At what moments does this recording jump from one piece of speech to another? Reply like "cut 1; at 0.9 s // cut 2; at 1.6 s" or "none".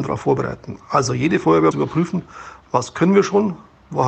cut 1; at 1.7 s